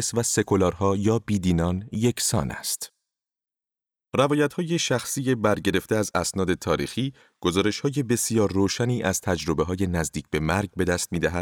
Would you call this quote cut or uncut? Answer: uncut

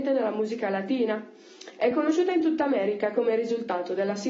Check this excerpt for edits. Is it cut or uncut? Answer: uncut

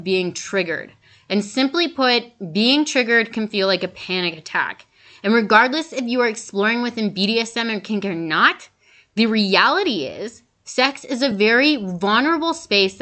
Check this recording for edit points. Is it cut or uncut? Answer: uncut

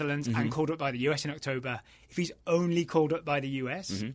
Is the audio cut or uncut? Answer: uncut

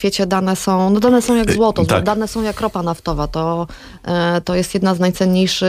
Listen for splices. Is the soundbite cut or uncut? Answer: uncut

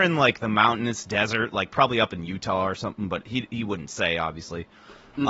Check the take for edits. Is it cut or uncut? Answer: uncut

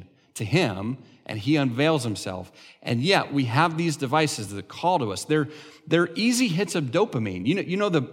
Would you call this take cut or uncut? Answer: uncut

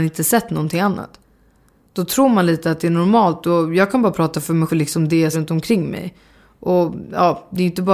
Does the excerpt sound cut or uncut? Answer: cut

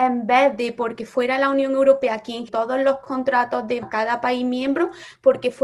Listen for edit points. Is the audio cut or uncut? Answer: cut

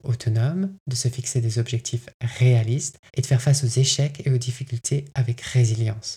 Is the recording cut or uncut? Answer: cut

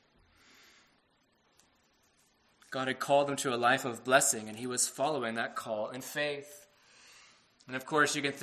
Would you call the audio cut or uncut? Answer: uncut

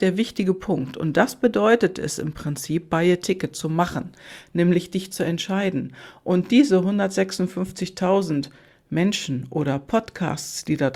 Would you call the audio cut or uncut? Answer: uncut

